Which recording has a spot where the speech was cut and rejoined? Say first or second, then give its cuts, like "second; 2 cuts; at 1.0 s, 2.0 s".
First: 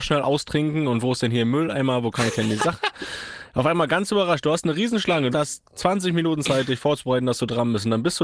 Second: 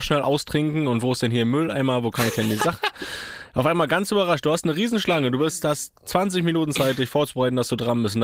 first; 1 cut; at 5.3 s